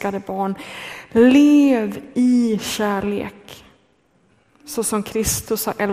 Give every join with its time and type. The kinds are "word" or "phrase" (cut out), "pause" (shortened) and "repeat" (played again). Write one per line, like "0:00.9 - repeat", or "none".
none

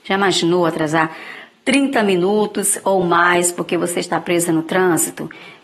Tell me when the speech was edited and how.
none

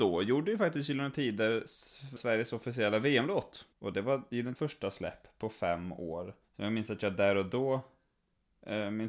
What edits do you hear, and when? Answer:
0:02.2 - word
0:03.7 - pause
0:04.6 - word
0:06.4 - pause

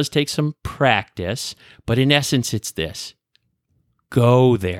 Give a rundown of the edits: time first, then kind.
none

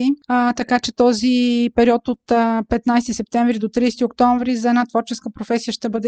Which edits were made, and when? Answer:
none

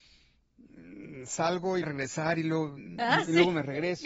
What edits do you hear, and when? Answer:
0:01.8 - phrase

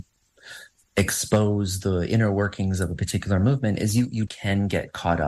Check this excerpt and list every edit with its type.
0:04.3 - word

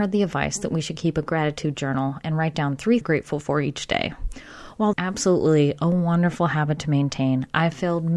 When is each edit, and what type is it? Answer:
0:03.0 - phrase
0:04.9 - phrase

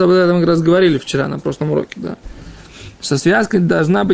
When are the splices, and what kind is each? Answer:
none

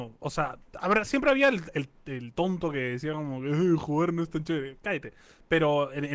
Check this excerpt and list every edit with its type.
none

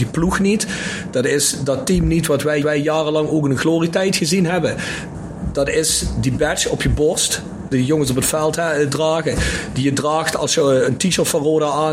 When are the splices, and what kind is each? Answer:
0:02.6 - repeat

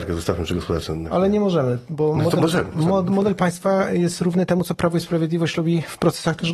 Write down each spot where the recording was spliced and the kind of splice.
none

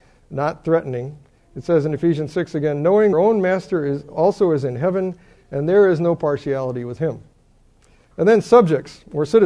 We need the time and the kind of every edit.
0:03.1 - phrase

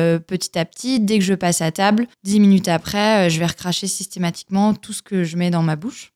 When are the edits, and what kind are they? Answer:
0:02.1 - pause

